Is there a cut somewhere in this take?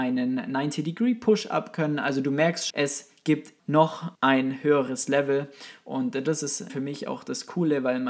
yes; 4 cuts; at 2.7 s, 3.6 s, 4.1 s, 6.7 s

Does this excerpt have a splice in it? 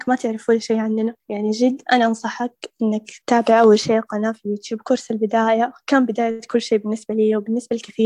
yes; 1 cut; at 3.2 s

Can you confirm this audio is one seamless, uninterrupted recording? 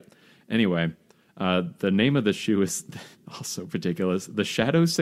yes; 0 cuts

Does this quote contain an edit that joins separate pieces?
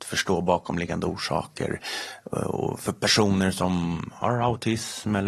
no; 0 cuts

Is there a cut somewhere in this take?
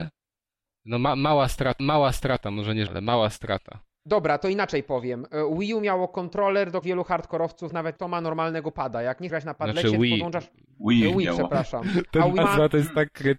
yes; 6 cuts; at 1.8 s, 2.9 s, 6.8 s, 8.0 s, 9.3 s, 12.4 s

